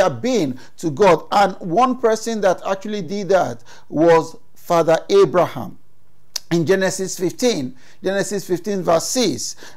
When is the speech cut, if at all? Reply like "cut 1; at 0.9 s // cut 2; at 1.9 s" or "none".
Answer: none